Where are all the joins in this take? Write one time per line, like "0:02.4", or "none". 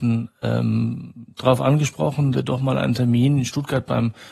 0:02.3